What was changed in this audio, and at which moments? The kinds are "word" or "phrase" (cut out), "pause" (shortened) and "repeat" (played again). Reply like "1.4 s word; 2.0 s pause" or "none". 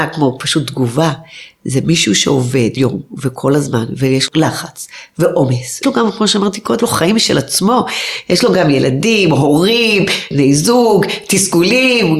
2.8 s word; 4.3 s word; 5.8 s word; 6.8 s word; 10.3 s word